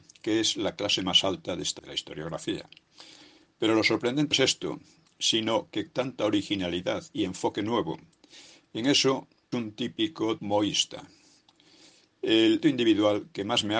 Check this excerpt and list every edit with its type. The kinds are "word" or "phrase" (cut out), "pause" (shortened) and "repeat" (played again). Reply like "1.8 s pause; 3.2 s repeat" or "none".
1.8 s word; 4.3 s word; 5.9 s word; 9.5 s word; 10.4 s word; 12.6 s word